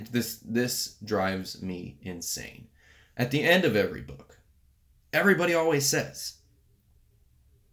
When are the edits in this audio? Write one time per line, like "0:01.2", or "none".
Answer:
none